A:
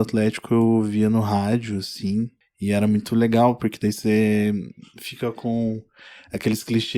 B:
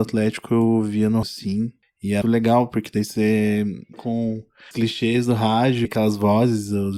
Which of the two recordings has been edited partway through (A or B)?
B